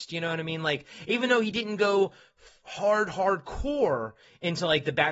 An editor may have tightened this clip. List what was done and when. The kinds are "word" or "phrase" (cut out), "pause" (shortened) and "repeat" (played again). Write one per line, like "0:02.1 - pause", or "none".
none